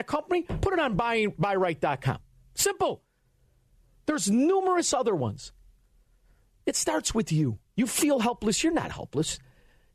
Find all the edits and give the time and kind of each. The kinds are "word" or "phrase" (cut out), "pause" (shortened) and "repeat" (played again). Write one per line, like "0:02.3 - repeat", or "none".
none